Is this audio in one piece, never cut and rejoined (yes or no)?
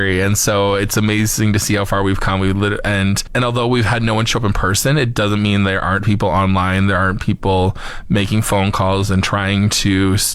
yes